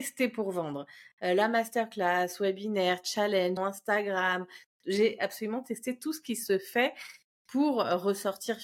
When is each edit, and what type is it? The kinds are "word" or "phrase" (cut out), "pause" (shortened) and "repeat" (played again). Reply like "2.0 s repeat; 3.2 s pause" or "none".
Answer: 3.6 s word

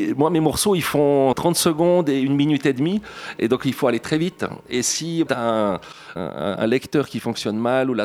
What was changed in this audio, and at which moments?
1.3 s word; 5.3 s word; 6.2 s word

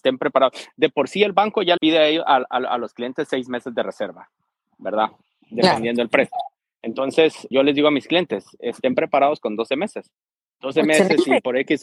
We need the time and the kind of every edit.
1.8 s word; 7.5 s word

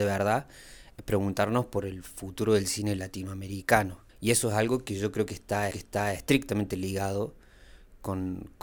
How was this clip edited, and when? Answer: 4.1 s pause; 5.7 s repeat

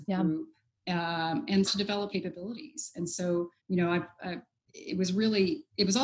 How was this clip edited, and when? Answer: 1.6 s word; 2.1 s word; 3.6 s pause

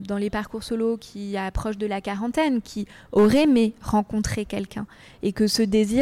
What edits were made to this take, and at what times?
none

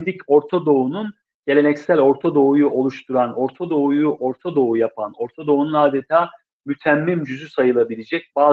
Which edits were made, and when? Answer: none

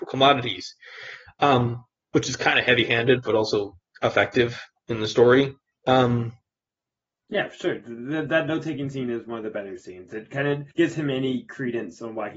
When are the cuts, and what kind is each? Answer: 2.0 s pause; 5.7 s pause; 10.7 s pause

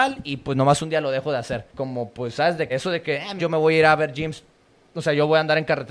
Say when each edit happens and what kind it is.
1.7 s pause; 2.7 s word; 3.4 s phrase

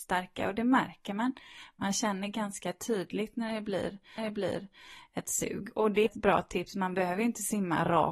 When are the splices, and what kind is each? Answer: 4.2 s repeat; 6.1 s phrase

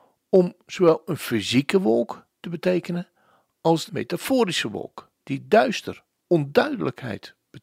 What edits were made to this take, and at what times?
2.3 s pause; 3.9 s word; 5.2 s pause; 6.2 s word

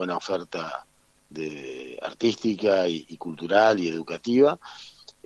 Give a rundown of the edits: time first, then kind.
none

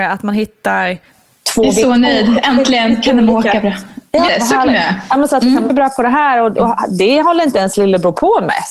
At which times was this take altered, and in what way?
4.3 s word; 5.7 s word

